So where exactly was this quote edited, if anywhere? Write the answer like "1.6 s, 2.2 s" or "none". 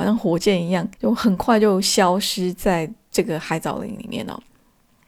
0.9 s

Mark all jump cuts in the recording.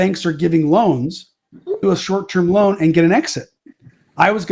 1.8 s

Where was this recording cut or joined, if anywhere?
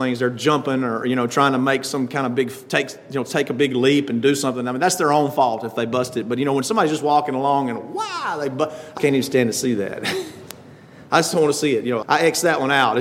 9.0 s, 12.0 s

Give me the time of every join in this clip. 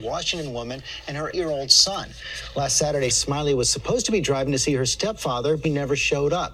1.3 s, 3.1 s, 5.6 s

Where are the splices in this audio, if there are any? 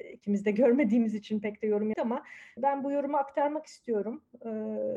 1.9 s, 2.6 s

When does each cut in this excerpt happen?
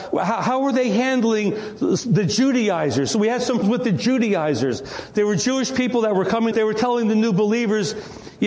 3.6 s, 6.5 s

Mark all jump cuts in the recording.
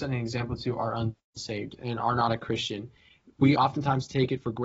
none

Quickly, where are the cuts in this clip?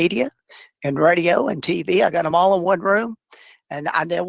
none

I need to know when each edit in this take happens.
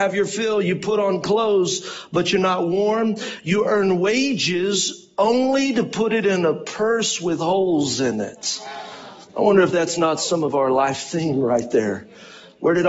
9.3 s

